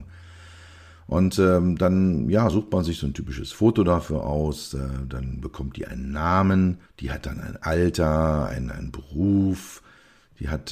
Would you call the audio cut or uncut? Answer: cut